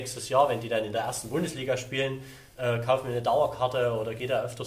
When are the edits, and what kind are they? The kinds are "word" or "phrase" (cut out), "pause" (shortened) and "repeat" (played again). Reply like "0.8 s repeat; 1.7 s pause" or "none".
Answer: none